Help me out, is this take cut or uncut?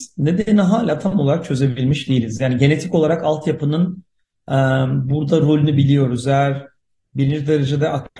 uncut